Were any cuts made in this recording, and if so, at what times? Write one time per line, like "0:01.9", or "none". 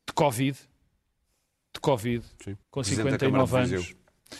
0:02.6